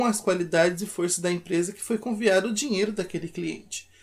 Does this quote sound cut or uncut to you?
uncut